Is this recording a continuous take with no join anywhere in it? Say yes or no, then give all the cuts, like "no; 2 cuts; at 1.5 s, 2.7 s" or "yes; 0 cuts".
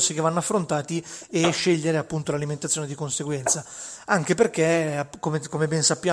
yes; 0 cuts